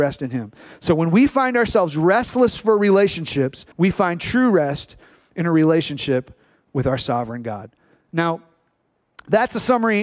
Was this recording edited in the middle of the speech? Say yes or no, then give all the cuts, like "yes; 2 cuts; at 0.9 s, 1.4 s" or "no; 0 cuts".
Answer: yes; 1 cut; at 3.7 s